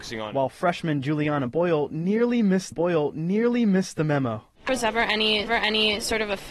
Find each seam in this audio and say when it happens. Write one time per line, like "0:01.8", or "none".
0:02.7
0:04.7
0:05.5